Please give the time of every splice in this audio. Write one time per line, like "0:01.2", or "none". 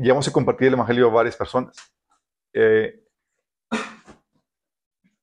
none

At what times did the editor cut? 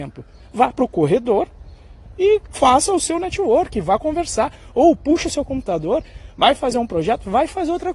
none

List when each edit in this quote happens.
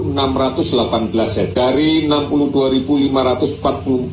0:01.5

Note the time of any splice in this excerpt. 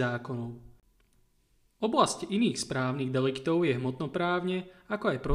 none

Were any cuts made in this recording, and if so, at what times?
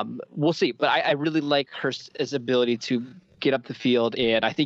0:01.0

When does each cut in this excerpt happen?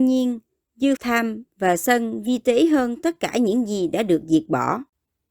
0:01.0

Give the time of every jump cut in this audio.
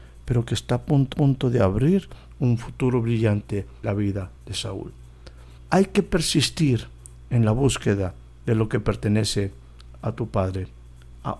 0:01.1
0:03.8
0:04.4
0:05.6

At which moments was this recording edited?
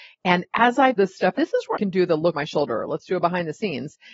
0:01.0
0:01.3
0:01.7
0:02.3

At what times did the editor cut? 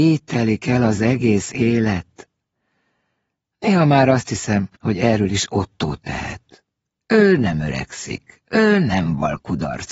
0:04.8

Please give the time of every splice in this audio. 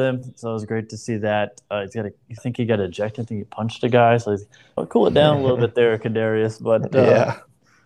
0:02.4
0:04.8

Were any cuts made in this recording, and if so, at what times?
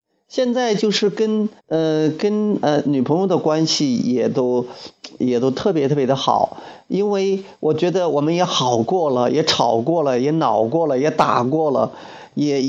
0:01.6

